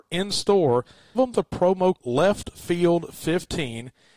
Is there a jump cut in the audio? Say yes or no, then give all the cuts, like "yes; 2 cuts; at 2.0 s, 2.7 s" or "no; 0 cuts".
yes; 2 cuts; at 1.1 s, 2.0 s